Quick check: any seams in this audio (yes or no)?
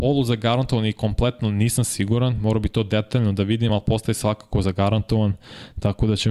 no